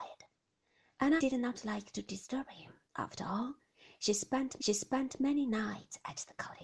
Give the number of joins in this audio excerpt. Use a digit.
3